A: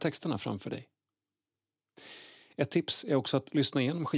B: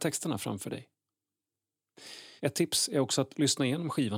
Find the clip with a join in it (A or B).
B